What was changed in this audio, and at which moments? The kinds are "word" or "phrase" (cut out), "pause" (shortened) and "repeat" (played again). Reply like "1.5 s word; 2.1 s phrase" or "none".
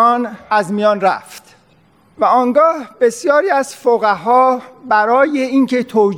none